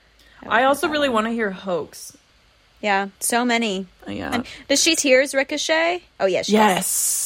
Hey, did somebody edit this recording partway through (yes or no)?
yes